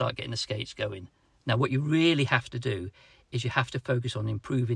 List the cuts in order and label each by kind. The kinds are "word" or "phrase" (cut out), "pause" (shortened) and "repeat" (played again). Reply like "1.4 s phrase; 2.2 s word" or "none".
none